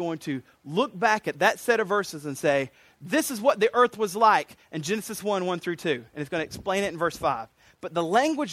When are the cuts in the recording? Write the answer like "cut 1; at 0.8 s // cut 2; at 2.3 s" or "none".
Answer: none